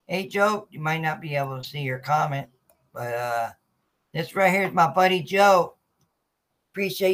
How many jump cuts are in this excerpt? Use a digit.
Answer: 0